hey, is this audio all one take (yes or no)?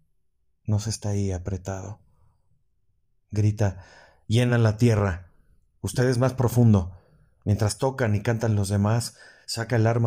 yes